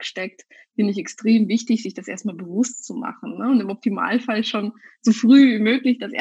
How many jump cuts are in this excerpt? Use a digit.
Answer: 0